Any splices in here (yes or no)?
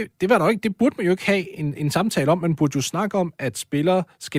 no